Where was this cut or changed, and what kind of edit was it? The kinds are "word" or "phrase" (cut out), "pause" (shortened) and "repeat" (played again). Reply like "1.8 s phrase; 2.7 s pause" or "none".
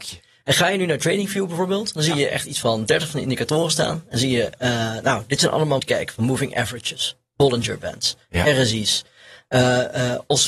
5.8 s phrase